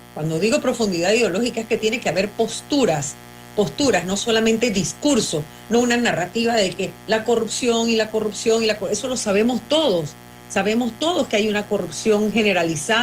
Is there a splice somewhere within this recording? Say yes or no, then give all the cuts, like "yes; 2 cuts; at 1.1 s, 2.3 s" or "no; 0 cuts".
no; 0 cuts